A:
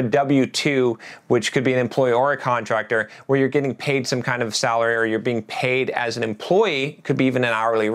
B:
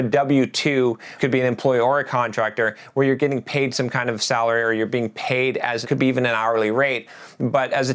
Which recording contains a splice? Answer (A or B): B